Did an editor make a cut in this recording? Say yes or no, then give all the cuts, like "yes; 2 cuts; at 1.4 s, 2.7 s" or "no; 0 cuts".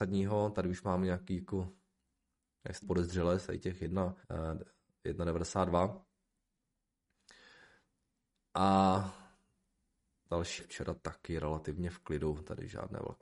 yes; 3 cuts; at 2.8 s, 4.2 s, 10.6 s